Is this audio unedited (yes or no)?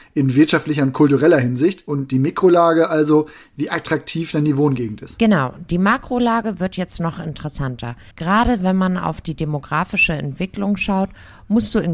no